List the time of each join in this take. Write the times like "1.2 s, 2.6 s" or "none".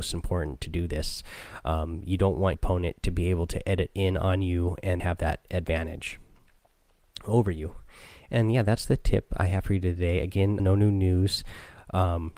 2.5 s, 5.0 s, 10.6 s

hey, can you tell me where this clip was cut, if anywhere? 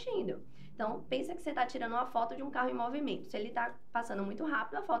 none

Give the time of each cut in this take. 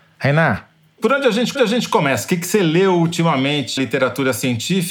1.6 s, 3.8 s

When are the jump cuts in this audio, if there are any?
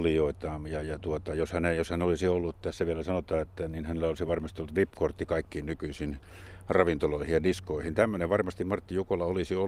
none

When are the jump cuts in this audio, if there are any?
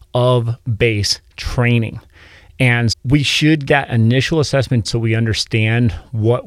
2.9 s, 3.7 s, 4.8 s

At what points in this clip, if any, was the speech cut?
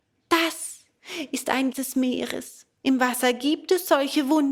1.7 s

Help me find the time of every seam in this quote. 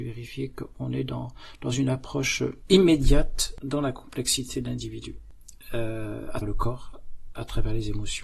6.4 s

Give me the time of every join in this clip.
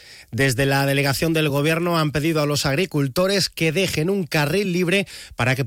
none

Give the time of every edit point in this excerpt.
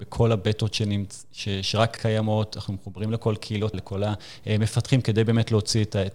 2.0 s, 3.7 s

